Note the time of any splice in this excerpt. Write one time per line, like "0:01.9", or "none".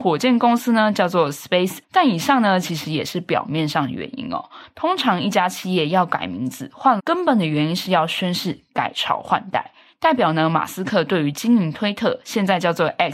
0:01.8
0:07.0